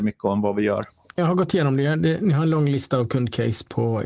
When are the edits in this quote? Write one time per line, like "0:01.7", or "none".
0:01.2